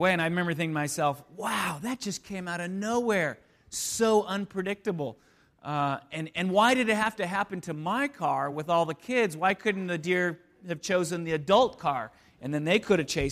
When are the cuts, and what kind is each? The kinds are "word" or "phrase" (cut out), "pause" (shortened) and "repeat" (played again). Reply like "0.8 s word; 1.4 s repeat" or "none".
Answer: none